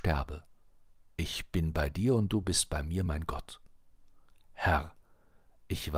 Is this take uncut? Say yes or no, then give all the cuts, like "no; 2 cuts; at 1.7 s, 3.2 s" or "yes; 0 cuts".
yes; 0 cuts